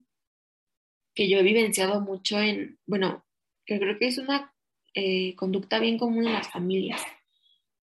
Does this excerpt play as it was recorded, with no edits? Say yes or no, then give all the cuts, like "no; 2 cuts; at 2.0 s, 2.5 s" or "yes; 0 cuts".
yes; 0 cuts